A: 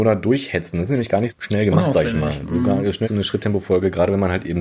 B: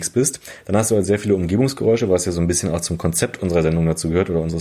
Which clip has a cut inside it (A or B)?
A